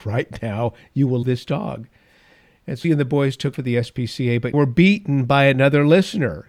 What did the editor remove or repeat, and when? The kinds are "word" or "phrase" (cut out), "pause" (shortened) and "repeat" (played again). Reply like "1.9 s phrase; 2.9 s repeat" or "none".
1.2 s word; 2.8 s word; 3.5 s word; 4.5 s word